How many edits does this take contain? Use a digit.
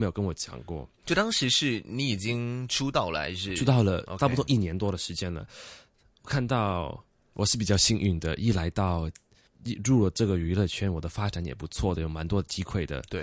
0